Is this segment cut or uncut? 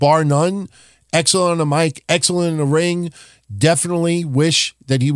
uncut